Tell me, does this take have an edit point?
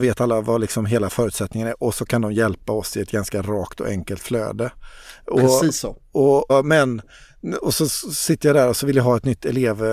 yes; 1 cut; at 6.5 s

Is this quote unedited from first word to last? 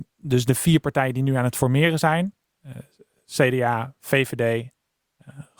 yes; 0 cuts

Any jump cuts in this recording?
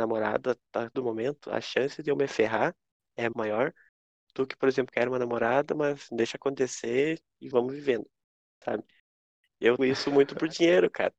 yes; 5 cuts; at 0.9 s, 3.3 s, 4.9 s, 7.5 s, 9.8 s

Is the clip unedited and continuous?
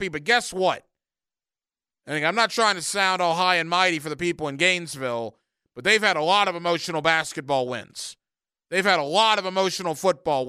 yes; 0 cuts

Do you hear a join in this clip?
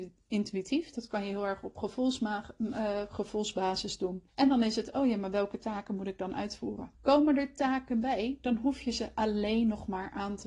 yes; 2 cuts; at 4.3 s, 6.9 s

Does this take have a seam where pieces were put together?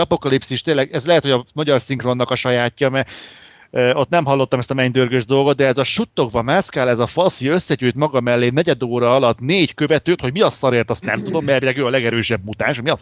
no; 0 cuts

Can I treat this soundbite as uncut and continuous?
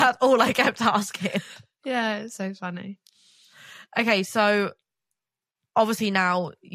yes; 0 cuts

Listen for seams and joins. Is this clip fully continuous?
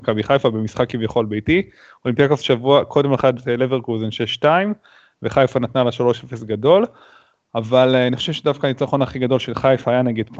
no; 1 cut; at 3.2 s

